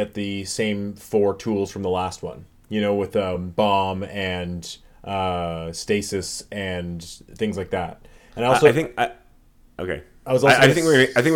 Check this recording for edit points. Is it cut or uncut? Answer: uncut